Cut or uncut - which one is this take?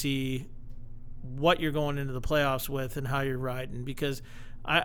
uncut